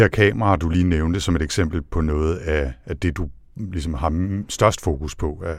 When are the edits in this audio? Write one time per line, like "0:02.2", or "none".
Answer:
none